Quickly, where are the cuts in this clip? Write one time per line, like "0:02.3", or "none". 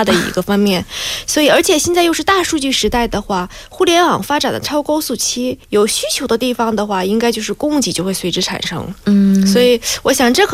0:05.6